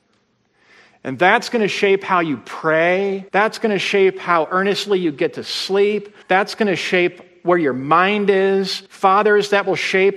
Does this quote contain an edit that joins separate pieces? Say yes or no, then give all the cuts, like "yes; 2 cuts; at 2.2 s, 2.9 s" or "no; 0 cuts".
yes; 3 cuts; at 3.3 s, 6.2 s, 8.9 s